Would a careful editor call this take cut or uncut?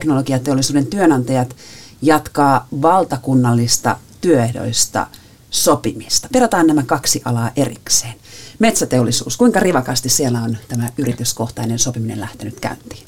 uncut